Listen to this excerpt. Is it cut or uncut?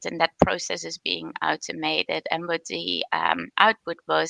uncut